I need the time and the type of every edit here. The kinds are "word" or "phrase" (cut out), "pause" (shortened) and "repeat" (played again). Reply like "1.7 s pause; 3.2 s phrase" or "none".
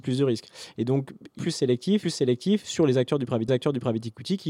1.4 s phrase; 2.0 s repeat; 3.5 s repeat